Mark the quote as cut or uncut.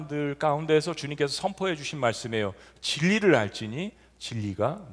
uncut